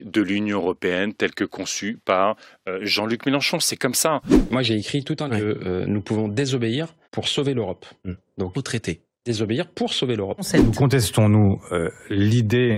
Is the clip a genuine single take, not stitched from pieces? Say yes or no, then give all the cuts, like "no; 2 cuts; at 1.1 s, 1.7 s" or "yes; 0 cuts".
no; 3 cuts; at 5.3 s, 7.0 s, 8.5 s